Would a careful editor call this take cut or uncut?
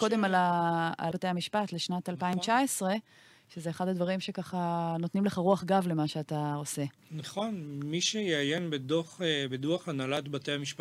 cut